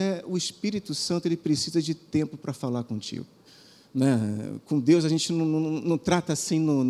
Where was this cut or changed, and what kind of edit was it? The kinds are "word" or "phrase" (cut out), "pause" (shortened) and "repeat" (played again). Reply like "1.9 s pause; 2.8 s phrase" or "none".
3.5 s pause